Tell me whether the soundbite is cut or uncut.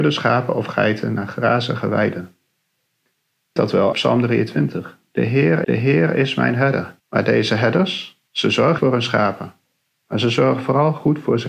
cut